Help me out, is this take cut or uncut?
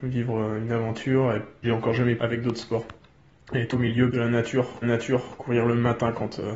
cut